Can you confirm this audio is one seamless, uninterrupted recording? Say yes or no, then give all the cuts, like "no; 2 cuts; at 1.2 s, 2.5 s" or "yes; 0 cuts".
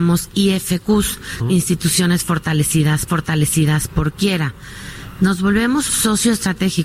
no; 3 cuts; at 1.4 s, 3.1 s, 5.9 s